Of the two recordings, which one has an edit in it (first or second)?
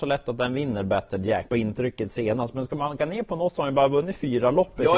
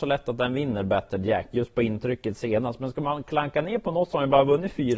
first